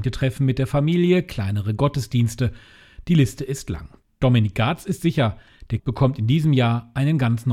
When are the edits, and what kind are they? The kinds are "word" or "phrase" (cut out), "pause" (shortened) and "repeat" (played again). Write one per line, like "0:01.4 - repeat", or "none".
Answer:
0:05.8 - word